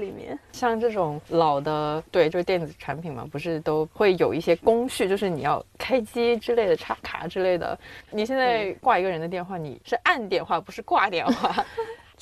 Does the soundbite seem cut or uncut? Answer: uncut